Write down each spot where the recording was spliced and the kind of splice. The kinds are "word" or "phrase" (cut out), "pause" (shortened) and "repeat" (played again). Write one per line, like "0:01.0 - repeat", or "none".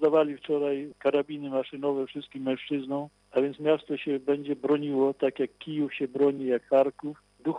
none